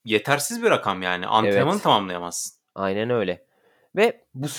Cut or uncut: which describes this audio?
uncut